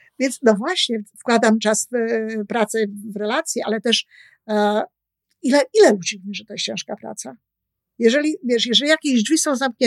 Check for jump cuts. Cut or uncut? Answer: uncut